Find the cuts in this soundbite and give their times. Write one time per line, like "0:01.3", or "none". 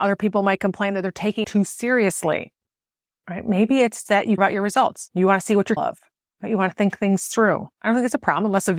0:01.4
0:04.4
0:05.8